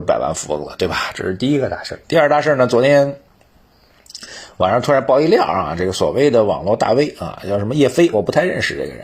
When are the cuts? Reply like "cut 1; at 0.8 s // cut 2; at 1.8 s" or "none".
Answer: cut 1; at 2.0 s